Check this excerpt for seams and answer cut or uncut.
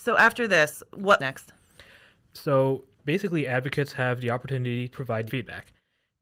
cut